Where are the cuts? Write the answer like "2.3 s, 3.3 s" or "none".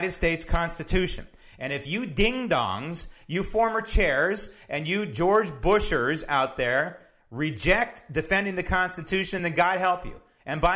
none